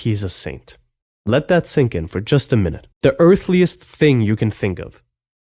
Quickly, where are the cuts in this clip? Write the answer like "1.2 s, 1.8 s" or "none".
1.1 s, 2.9 s